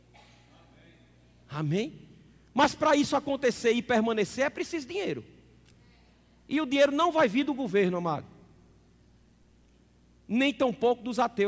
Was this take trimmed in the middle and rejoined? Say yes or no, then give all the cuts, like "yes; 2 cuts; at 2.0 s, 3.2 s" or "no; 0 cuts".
no; 0 cuts